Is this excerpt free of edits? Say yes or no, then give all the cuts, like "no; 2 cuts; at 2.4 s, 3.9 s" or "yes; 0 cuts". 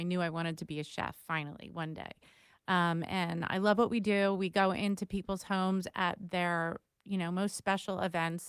yes; 0 cuts